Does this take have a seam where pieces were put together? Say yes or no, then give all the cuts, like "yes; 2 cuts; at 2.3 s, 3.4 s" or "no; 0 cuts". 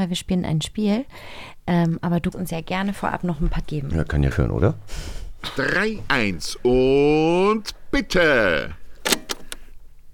yes; 5 cuts; at 2.3 s, 2.9 s, 3.6 s, 4.3 s, 6.1 s